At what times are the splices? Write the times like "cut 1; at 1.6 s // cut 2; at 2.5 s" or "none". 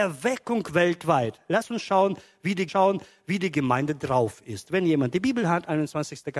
cut 1; at 2.7 s

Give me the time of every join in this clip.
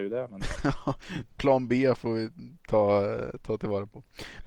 none

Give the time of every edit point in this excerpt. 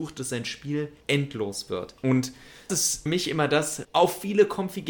cut 1; at 1.0 s // cut 2; at 2.7 s // cut 3; at 3.1 s // cut 4; at 3.8 s

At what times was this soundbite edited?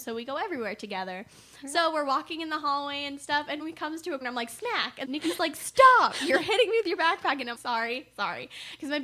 cut 1; at 3.6 s // cut 2; at 4.2 s // cut 3; at 5.0 s // cut 4; at 7.5 s

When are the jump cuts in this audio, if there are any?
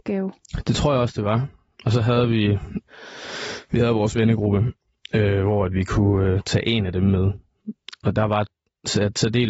none

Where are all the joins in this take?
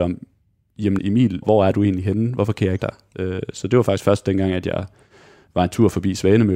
cut 1; at 1.0 s // cut 2; at 1.4 s // cut 3; at 2.8 s

